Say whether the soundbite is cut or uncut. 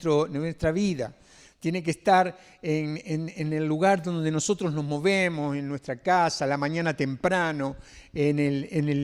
uncut